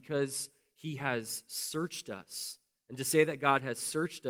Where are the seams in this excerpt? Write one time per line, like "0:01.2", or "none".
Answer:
none